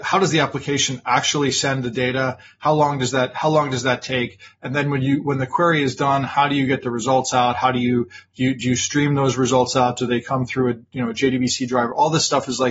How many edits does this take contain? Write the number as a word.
zero